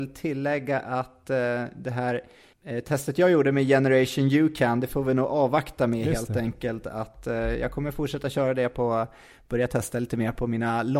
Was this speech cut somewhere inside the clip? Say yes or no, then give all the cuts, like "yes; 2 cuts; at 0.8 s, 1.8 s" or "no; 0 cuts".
no; 0 cuts